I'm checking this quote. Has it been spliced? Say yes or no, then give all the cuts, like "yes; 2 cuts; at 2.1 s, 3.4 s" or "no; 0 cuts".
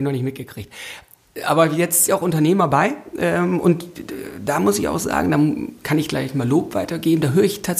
yes; 1 cut; at 2.1 s